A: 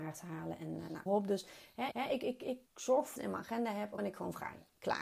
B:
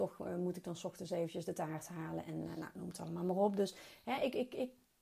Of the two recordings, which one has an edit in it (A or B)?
A